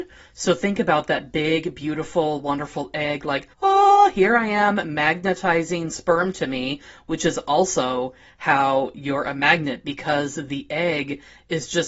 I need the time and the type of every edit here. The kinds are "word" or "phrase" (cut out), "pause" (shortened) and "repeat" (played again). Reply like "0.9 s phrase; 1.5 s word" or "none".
3.5 s pause